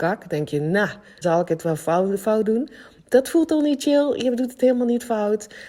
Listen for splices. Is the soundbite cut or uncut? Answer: cut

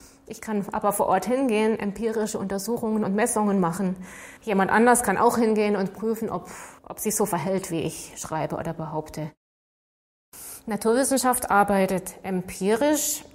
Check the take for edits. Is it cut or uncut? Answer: cut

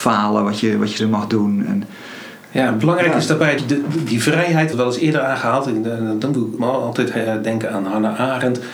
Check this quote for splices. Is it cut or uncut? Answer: cut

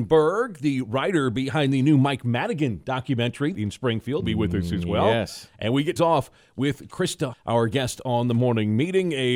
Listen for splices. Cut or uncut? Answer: cut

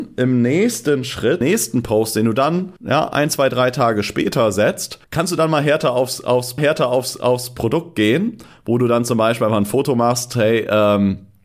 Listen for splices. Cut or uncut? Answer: cut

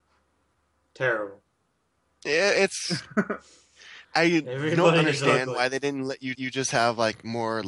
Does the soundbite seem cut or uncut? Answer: cut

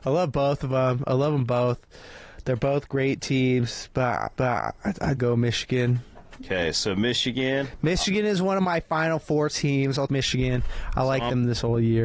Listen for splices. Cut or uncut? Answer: cut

